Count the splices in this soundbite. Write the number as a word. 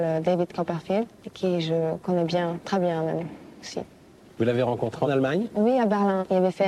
one